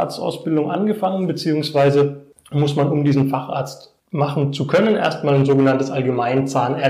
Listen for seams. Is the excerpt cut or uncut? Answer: cut